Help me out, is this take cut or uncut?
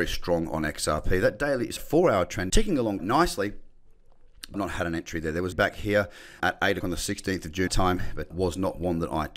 cut